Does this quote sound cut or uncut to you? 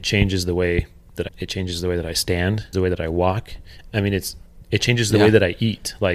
cut